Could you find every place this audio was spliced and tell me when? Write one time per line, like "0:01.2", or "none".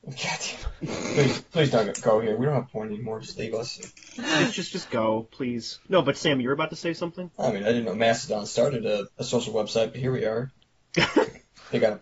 0:05.9
0:07.3
0:09.1